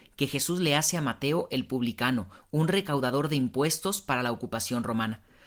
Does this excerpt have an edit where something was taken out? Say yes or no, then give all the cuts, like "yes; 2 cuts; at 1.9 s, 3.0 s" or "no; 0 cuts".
no; 0 cuts